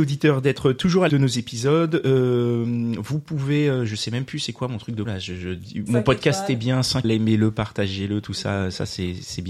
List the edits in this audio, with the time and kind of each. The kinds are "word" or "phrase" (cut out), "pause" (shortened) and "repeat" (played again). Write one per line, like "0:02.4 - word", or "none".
0:01.1 - word
0:05.1 - word
0:05.9 - word
0:07.0 - word